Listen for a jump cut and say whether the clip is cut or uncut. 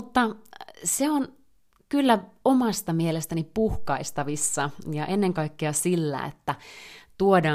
uncut